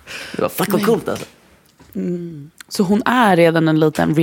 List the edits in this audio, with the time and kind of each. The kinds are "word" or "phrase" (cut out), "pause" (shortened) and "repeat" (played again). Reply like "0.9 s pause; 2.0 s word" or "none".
none